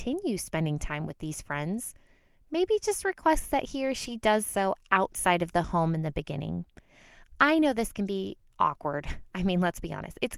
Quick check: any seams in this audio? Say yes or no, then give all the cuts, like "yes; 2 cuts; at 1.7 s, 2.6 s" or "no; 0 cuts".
no; 0 cuts